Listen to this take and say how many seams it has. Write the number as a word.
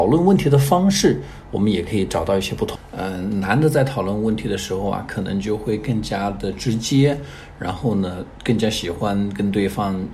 zero